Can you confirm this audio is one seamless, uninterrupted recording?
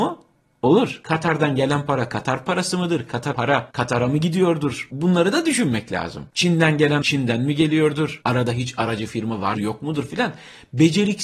no; 3 cuts; at 3.3 s, 7.0 s, 9.5 s

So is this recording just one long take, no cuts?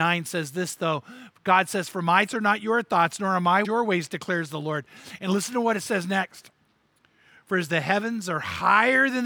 no; 2 cuts; at 2.3 s, 3.6 s

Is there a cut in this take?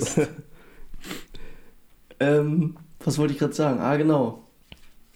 no; 0 cuts

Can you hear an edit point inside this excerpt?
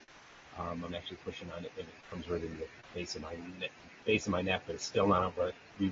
no; 0 cuts

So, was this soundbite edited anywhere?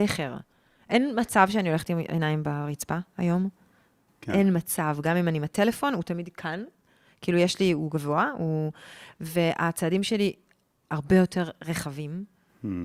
no; 0 cuts

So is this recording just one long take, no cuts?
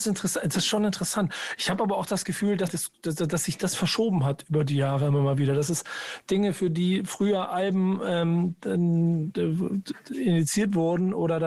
no; 1 cut; at 2.7 s

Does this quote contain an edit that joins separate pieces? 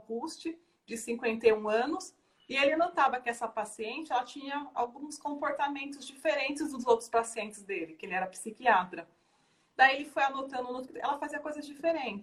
yes; 1 cut; at 10.9 s

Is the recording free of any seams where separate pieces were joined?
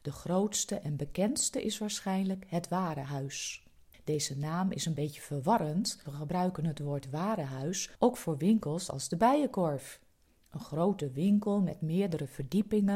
no; 1 cut; at 6.0 s

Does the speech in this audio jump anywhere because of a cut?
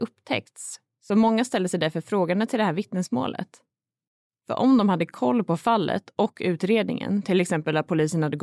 no; 0 cuts

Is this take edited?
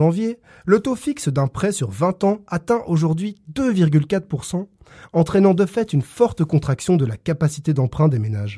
no; 0 cuts

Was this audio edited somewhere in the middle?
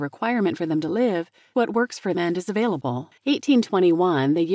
yes; 3 cuts; at 1.5 s, 2.1 s, 3.2 s

